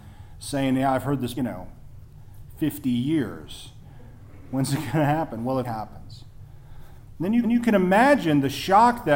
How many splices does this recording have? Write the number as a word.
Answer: three